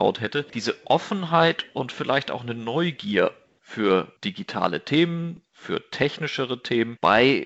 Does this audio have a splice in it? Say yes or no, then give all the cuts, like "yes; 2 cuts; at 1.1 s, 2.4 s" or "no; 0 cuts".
no; 0 cuts